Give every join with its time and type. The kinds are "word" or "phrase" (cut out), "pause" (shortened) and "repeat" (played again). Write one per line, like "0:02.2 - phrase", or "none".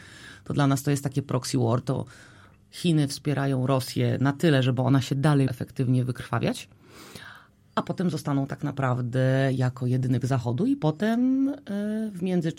0:05.5 - word
0:10.2 - word

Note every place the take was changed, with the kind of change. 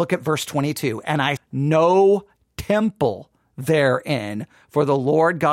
0:01.4 - word

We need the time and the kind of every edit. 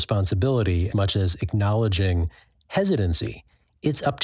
0:00.9 - word

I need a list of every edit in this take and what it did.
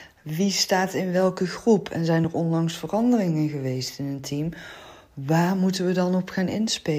none

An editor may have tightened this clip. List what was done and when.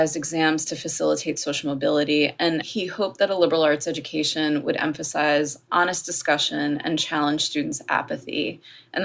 none

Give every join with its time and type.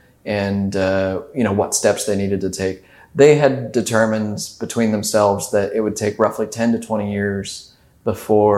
none

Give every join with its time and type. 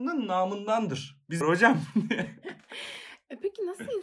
0:01.4 - phrase

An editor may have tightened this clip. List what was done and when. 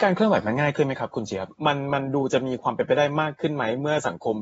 0:01.6 - pause

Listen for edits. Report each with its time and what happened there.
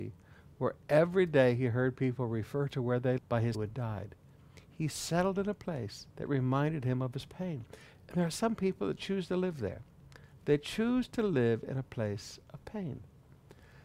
0:03.2 - word
0:03.5 - phrase
0:06.1 - pause
0:09.0 - word

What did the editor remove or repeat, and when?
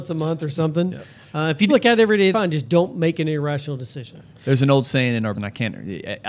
0:01.7 - word
0:02.3 - word
0:05.4 - word

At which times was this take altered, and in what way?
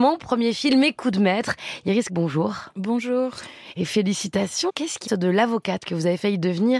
0:02.1 - word
0:04.7 - word
0:05.1 - word

